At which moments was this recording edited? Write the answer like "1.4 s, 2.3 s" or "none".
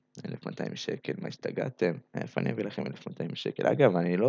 2.1 s